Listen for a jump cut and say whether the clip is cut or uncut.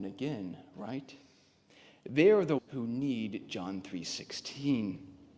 cut